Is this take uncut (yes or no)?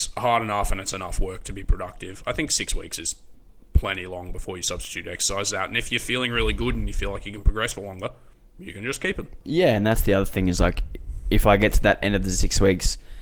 yes